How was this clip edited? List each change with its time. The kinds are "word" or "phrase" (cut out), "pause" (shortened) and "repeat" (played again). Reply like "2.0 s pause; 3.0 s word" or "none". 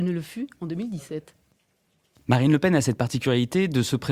none